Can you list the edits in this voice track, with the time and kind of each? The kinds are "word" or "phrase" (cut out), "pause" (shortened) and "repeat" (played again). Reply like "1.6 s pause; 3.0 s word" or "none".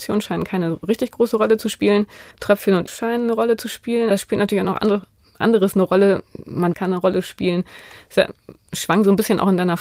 2.3 s pause; 2.9 s word; 4.1 s word; 6.7 s phrase